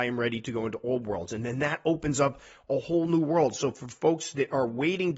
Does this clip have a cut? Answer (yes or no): no